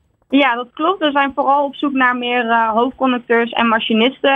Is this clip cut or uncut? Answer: uncut